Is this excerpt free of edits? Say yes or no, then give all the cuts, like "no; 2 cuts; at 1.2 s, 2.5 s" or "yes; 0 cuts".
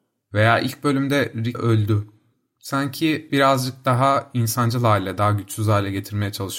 no; 2 cuts; at 1.5 s, 3.3 s